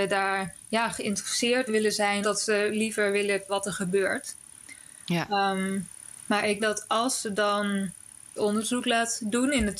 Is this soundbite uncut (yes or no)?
no